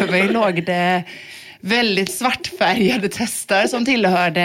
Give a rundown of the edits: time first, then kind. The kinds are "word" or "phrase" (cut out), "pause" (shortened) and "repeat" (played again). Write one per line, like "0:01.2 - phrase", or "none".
0:02.1 - word